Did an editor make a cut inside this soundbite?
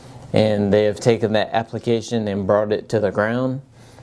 no; 0 cuts

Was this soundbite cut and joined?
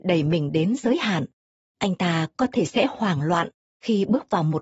no; 0 cuts

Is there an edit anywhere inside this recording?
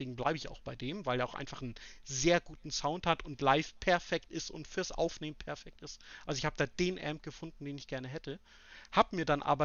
no; 0 cuts

